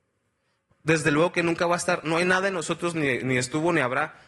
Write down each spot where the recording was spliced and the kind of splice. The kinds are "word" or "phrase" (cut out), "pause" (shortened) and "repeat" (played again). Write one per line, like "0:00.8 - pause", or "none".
none